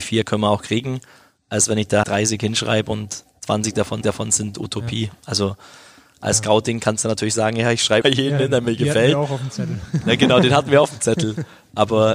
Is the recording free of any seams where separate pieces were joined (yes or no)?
no